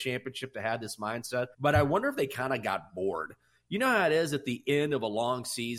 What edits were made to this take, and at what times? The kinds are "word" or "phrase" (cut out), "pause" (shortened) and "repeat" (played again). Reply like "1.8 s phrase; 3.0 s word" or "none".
1.5 s pause